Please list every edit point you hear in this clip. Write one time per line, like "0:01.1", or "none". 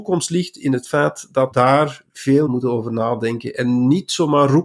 0:01.5
0:02.5